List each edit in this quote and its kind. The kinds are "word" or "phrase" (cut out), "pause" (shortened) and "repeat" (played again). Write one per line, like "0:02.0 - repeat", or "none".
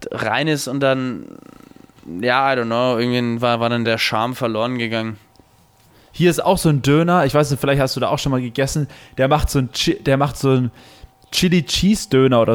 0:03.8 - word